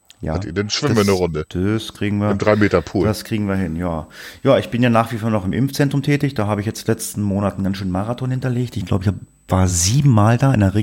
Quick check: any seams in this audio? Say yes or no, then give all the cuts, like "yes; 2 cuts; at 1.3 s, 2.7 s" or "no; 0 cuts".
no; 0 cuts